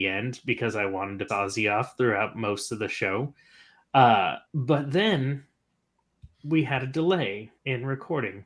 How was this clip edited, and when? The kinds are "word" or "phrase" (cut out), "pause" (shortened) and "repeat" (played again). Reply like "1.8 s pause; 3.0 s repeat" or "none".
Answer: 1.3 s word; 4.4 s pause; 6.3 s pause; 7.6 s pause